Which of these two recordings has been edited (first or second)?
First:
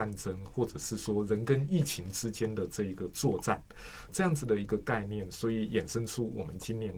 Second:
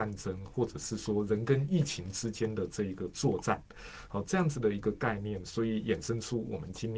first